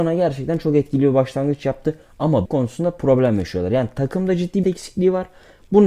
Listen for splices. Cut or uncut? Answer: cut